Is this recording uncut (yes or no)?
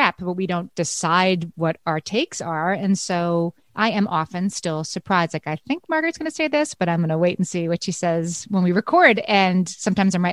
yes